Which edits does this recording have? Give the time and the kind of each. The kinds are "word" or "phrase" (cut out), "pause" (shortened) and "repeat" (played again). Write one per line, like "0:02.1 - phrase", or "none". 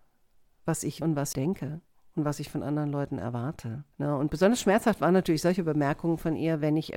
0:01.0 - word
0:01.3 - word
0:03.9 - pause